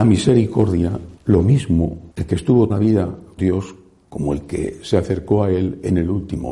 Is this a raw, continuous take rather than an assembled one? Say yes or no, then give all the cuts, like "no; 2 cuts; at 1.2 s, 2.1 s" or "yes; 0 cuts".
no; 4 cuts; at 1.2 s, 2.1 s, 2.7 s, 3.4 s